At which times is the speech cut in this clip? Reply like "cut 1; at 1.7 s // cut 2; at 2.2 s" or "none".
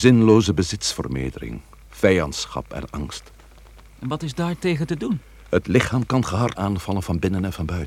cut 1; at 6.6 s